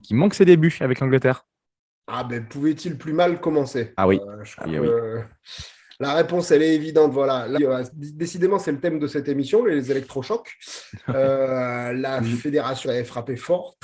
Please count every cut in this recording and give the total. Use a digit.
4